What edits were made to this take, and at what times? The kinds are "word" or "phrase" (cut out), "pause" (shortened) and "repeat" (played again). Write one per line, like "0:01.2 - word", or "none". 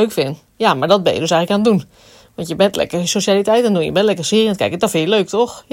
none